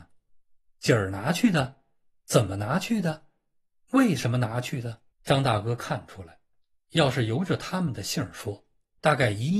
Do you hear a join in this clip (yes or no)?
yes